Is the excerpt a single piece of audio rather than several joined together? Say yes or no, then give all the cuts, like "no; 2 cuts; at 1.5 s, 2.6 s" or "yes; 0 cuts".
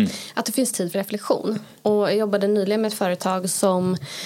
no; 1 cut; at 0.9 s